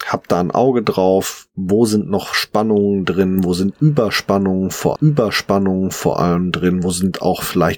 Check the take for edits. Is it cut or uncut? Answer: cut